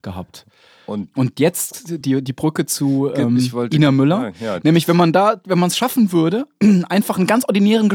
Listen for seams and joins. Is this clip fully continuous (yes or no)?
yes